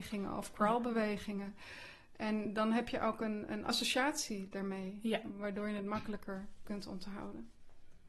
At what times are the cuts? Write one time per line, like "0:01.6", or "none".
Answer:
none